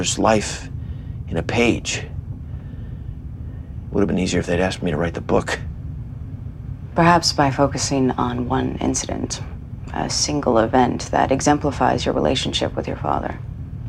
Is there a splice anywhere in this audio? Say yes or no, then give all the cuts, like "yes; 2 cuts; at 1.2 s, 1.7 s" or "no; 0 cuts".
no; 0 cuts